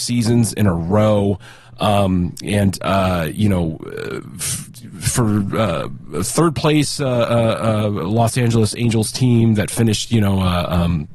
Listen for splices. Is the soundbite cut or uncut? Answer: uncut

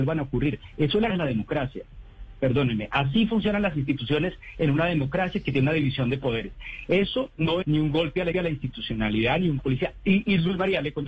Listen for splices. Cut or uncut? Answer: cut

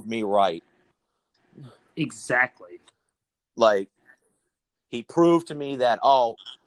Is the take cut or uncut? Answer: uncut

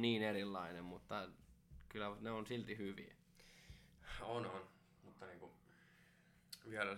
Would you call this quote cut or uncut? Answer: uncut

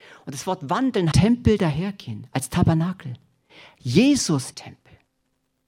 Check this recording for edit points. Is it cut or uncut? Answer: cut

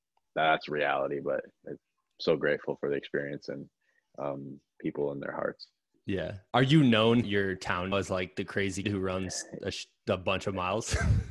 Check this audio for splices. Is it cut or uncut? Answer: cut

